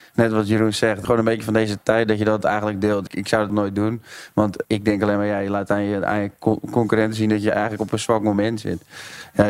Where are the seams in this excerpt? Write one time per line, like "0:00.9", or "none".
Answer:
0:01.0
0:03.1
0:03.5
0:04.6